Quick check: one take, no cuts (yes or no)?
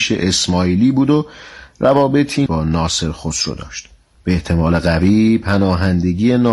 no